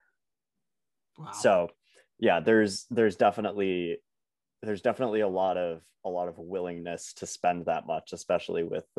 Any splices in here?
no; 0 cuts

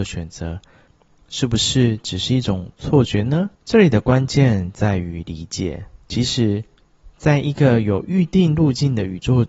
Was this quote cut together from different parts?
yes; 2 cuts; at 3.5 s, 6.0 s

